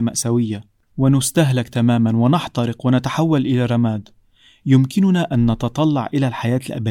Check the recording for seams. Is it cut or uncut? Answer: uncut